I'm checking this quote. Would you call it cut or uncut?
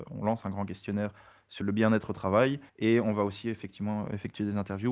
cut